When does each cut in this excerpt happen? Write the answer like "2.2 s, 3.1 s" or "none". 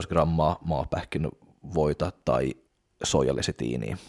2.7 s